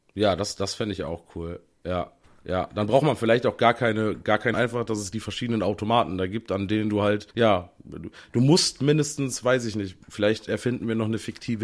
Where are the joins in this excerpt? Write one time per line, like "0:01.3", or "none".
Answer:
0:02.2
0:04.5
0:07.3